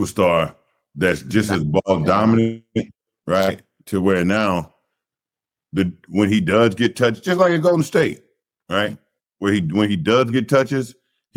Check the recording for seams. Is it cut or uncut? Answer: uncut